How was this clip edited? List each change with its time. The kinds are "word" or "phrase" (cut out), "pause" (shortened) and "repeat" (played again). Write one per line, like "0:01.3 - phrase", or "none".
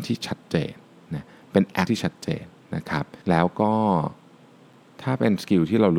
0:01.9 - word
0:03.2 - pause